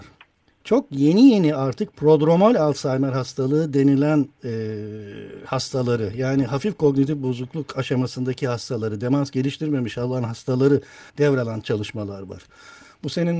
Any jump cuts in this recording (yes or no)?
yes